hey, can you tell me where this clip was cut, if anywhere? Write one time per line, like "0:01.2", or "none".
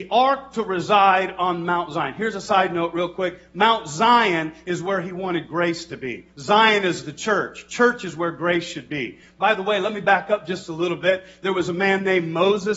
0:06.3